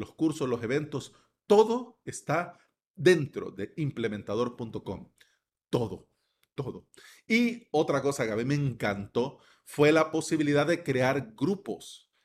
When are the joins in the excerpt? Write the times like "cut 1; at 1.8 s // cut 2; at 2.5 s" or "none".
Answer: none